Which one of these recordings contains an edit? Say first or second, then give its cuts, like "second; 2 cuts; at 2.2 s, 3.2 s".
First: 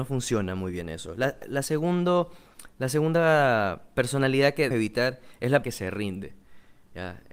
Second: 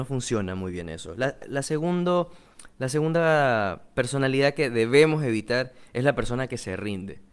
first; 2 cuts; at 4.7 s, 5.6 s